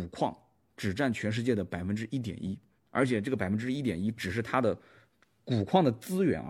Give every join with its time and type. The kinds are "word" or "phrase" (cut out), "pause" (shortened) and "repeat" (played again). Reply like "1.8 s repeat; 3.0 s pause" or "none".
none